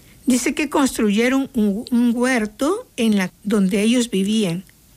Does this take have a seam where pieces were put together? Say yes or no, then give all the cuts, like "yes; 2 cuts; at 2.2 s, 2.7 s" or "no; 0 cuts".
yes; 2 cuts; at 2.9 s, 3.3 s